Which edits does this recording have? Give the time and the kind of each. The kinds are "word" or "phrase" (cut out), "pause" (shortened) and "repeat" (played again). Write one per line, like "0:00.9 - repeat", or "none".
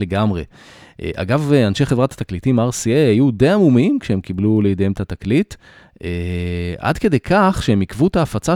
none